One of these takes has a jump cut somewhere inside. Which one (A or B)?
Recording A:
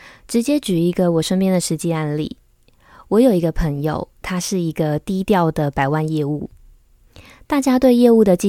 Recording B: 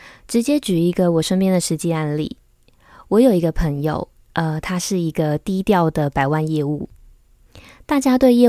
A